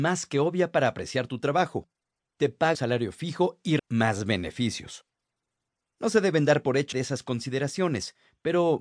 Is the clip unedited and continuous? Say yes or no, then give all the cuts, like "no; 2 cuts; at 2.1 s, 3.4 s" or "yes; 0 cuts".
no; 3 cuts; at 2.7 s, 3.8 s, 6.9 s